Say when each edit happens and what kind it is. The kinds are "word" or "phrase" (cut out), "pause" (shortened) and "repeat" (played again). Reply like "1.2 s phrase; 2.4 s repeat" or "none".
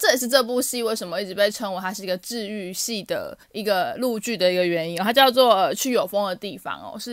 3.4 s pause